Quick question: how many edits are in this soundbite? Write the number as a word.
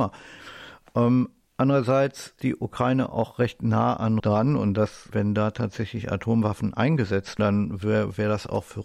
four